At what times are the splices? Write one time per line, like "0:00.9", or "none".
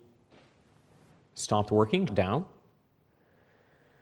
0:02.1